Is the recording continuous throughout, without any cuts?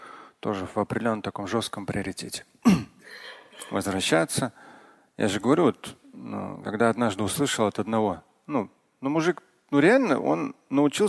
yes; 0 cuts

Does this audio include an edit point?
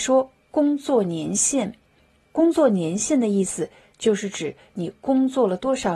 no; 0 cuts

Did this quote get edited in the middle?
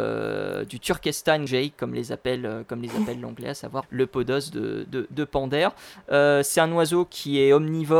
yes; 2 cuts; at 1.5 s, 3.8 s

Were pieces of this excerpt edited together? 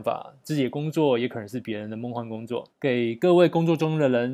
yes; 1 cut; at 2.7 s

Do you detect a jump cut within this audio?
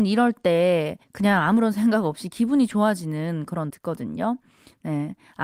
yes; 2 cuts; at 1.0 s, 3.7 s

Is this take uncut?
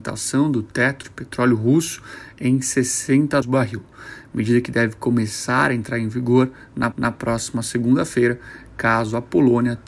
no; 3 cuts; at 1.0 s, 3.4 s, 6.9 s

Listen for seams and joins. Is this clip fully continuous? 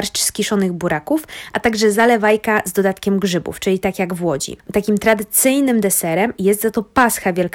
yes; 0 cuts

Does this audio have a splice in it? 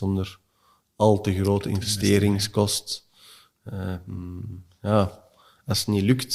no; 0 cuts

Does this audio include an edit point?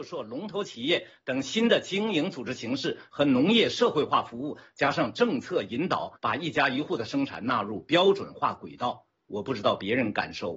yes; 1 cut; at 6.2 s

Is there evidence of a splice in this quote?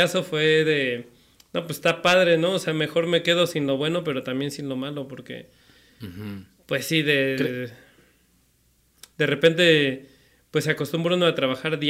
no; 0 cuts

